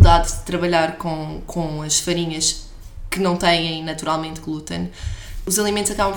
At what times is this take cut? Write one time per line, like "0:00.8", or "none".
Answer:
none